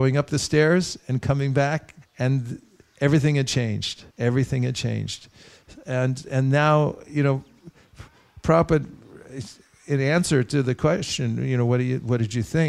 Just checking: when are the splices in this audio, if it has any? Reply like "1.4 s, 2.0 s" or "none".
2.0 s, 4.1 s